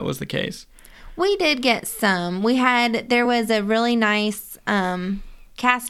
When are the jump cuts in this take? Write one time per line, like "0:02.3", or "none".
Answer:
none